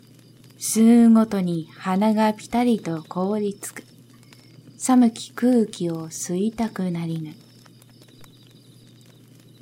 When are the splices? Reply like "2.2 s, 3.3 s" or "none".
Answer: none